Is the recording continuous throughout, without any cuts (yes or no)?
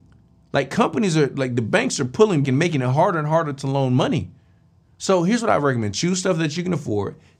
no